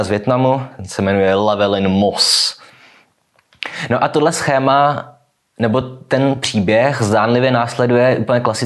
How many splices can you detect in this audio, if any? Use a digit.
0